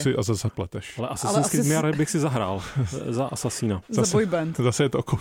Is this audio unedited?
yes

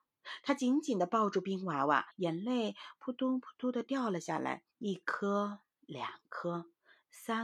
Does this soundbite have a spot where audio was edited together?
yes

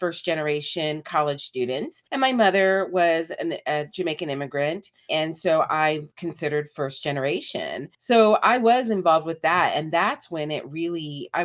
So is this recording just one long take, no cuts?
no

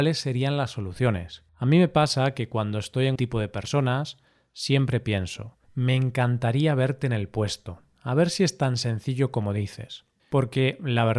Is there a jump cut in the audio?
yes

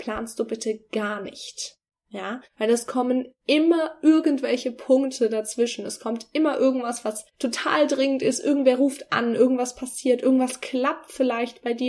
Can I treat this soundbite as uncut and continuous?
no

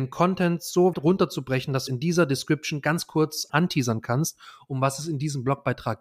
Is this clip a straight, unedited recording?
no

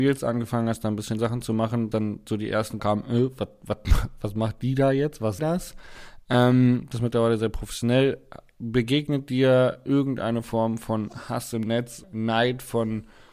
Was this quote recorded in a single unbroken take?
no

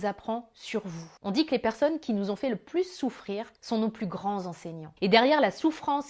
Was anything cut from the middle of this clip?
yes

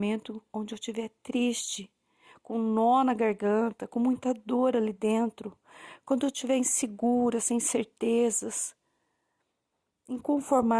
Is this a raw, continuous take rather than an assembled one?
yes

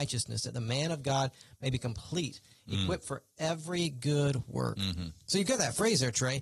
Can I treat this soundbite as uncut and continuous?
yes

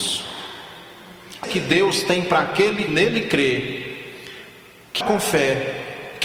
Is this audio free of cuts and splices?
no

